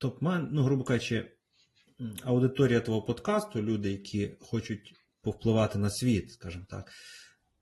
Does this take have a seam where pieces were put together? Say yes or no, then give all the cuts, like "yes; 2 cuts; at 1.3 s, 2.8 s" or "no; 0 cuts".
no; 0 cuts